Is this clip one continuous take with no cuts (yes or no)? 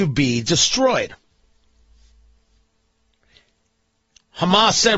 yes